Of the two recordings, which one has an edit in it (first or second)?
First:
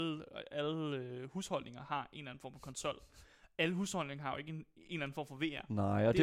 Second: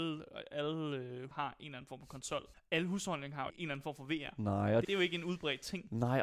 second